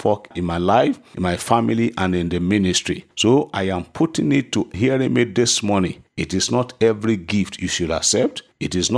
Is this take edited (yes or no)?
yes